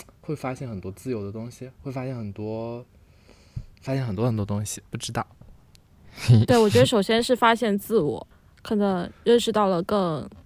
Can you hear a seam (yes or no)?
yes